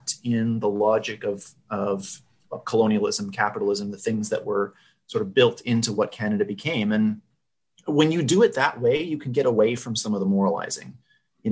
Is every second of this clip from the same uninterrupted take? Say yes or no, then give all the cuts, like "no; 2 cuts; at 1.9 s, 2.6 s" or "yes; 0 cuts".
yes; 0 cuts